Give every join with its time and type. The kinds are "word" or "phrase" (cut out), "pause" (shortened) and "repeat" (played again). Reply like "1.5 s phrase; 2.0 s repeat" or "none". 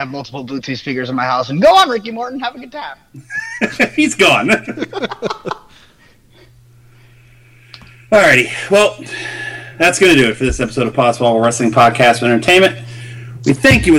none